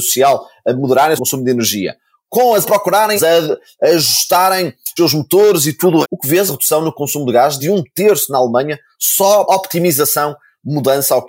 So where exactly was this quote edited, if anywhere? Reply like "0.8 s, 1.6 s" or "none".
1.2 s, 2.6 s, 3.2 s, 5.0 s, 6.0 s, 6.5 s, 7.6 s, 9.5 s